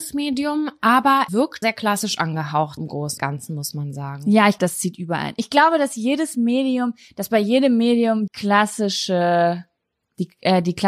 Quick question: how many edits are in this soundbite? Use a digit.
6